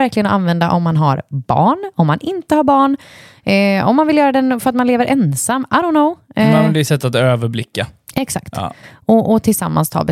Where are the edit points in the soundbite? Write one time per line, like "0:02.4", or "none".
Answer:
none